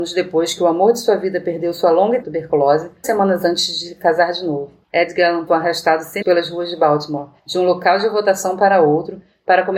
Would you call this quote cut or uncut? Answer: cut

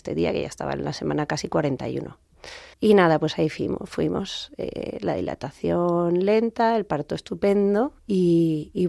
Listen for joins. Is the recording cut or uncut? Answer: cut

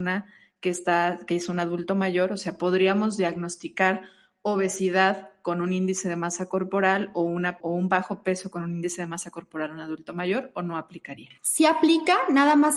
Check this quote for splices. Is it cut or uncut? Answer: cut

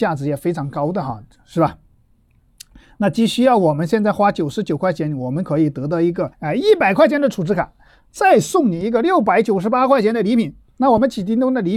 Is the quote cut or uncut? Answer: cut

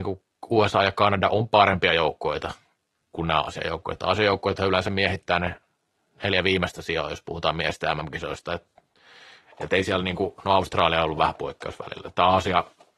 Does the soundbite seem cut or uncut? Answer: uncut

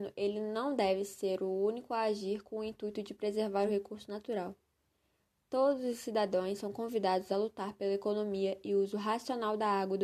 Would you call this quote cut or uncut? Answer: uncut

